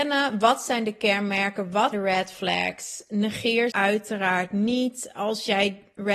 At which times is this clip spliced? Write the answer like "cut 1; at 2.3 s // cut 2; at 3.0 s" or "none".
cut 1; at 1.9 s // cut 2; at 3.7 s

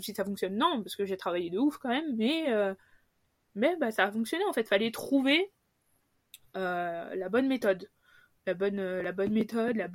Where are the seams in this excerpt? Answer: none

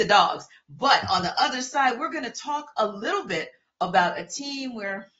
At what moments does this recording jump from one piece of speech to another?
none

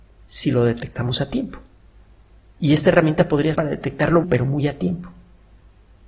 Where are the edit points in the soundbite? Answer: cut 1; at 3.5 s // cut 2; at 4.2 s

